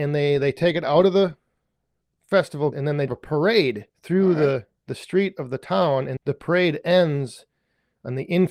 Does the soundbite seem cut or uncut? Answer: cut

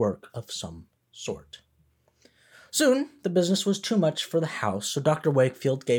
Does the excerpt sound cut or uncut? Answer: uncut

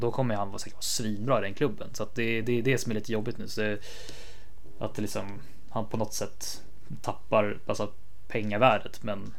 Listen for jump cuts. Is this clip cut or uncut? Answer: uncut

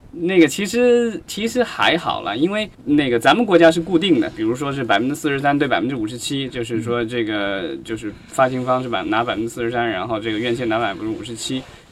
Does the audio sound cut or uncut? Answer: cut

